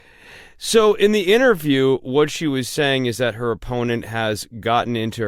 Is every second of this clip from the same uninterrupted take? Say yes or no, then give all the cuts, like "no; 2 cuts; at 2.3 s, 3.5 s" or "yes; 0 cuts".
yes; 0 cuts